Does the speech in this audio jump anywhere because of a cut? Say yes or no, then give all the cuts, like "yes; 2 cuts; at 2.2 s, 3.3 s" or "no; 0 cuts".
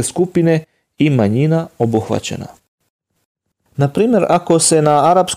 no; 0 cuts